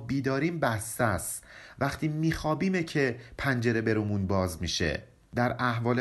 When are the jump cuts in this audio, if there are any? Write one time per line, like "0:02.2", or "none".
none